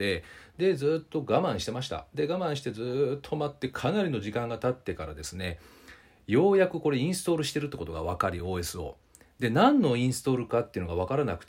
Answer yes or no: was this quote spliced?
no